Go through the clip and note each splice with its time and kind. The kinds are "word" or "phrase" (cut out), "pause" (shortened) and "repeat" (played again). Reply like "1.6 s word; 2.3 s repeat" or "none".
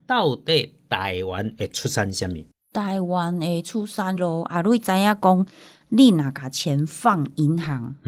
4.2 s word